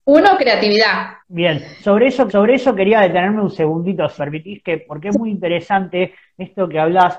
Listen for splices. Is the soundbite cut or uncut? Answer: cut